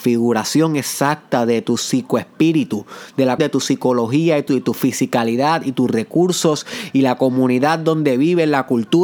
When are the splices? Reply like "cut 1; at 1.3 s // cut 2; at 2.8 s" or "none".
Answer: cut 1; at 3.4 s // cut 2; at 4.5 s